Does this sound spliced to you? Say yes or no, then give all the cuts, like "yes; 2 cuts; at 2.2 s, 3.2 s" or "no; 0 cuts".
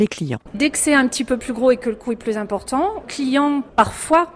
yes; 1 cut; at 3.0 s